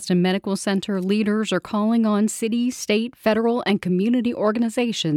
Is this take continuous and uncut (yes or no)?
yes